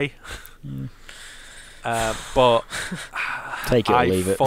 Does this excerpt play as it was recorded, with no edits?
yes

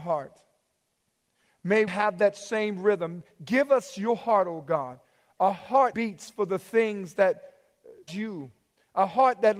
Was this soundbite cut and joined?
yes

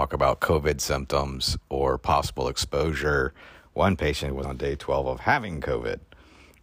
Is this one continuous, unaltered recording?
no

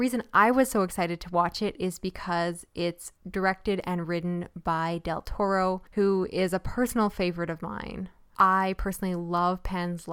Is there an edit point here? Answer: no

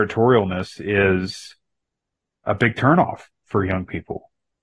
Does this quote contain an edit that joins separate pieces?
no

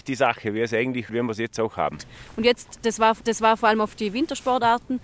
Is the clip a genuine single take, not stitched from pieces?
no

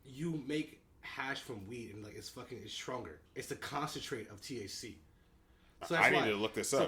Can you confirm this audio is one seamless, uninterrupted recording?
no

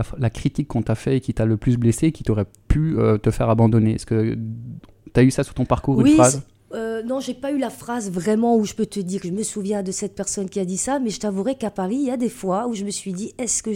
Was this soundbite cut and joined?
no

